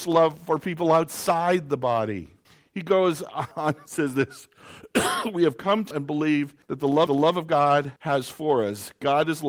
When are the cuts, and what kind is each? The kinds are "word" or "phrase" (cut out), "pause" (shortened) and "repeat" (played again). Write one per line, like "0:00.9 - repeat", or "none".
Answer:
0:02.4 - pause
0:03.5 - pause
0:05.9 - word
0:06.6 - pause
0:07.1 - repeat
0:08.0 - pause

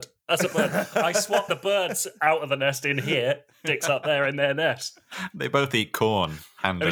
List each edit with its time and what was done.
0:01.5 - word

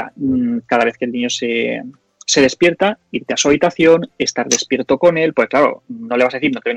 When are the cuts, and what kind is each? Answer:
none

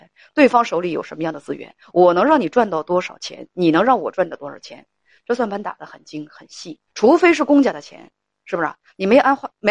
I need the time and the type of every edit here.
0:06.9 - pause

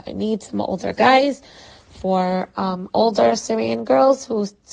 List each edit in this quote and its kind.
none

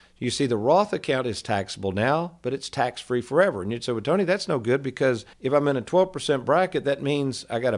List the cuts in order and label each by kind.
0:05.3 - pause

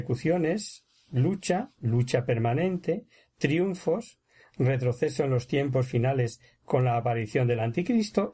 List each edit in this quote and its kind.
none

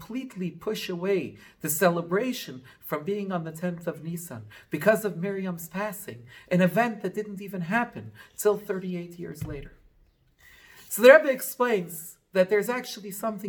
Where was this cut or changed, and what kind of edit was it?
none

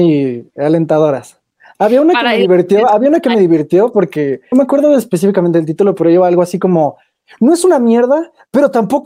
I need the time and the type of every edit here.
0:04.5 - word

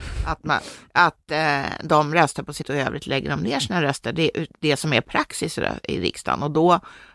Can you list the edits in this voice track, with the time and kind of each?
0:02.6 - phrase

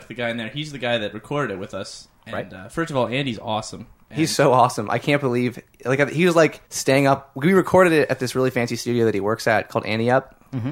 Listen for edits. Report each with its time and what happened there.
0:06.6 - pause

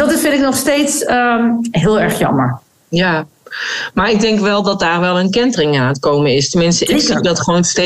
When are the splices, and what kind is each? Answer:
none

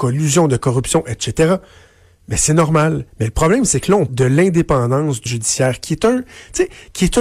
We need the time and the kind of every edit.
0:03.1 - pause
0:04.1 - word
0:05.3 - word

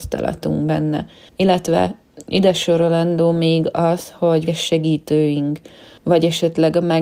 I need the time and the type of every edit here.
0:04.5 - word

